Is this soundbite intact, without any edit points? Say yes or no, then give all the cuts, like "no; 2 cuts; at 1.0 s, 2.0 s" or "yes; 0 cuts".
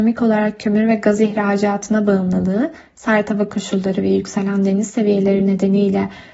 yes; 0 cuts